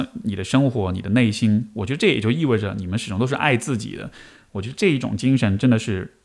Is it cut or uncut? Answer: uncut